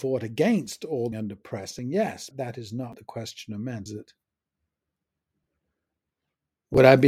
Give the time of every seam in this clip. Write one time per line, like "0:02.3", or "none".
0:01.1
0:02.3
0:02.9
0:03.9